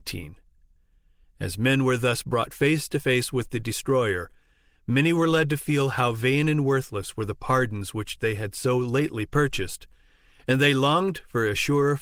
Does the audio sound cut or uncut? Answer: uncut